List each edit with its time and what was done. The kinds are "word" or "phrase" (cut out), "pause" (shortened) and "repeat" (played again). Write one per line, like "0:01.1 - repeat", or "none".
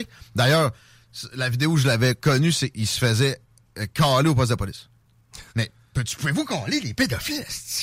0:05.5 - pause